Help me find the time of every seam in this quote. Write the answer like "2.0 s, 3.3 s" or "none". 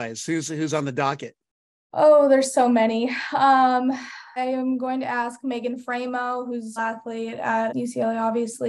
4.4 s, 6.8 s, 7.7 s

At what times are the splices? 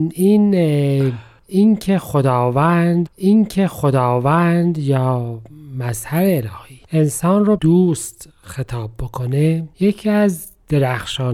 3.1 s, 6.8 s, 7.6 s, 9.7 s

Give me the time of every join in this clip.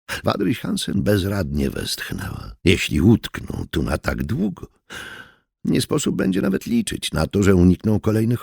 2.6 s

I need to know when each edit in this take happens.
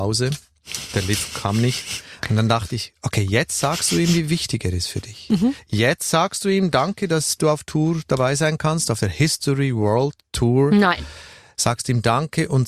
none

